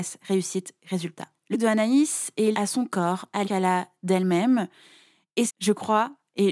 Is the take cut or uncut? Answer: cut